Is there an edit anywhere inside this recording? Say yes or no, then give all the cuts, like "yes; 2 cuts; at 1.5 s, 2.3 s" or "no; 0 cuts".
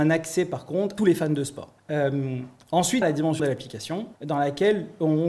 yes; 5 cuts; at 1.0 s, 1.8 s, 3.0 s, 3.4 s, 4.2 s